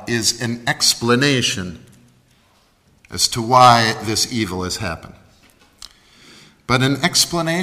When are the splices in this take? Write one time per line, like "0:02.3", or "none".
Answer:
none

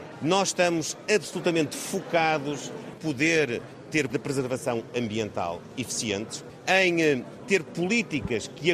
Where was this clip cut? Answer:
0:02.9
0:04.1

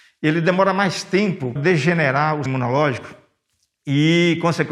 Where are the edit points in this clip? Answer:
0:01.6
0:02.5

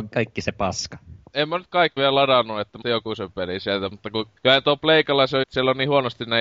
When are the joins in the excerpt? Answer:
0:02.0
0:02.8
0:04.4
0:05.4

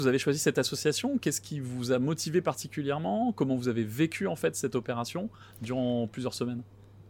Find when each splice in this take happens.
none

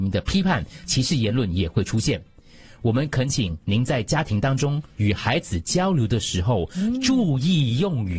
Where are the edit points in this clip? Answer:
none

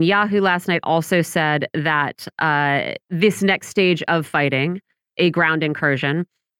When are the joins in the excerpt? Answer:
0:03.0

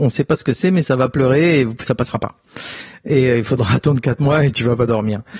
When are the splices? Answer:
none

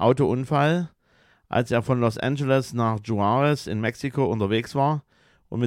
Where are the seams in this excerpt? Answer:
none

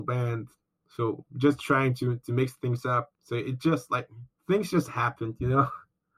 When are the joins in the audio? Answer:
0:03.1

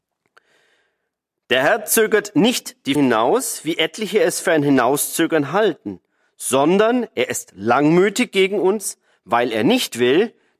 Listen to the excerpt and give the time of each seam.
0:03.0

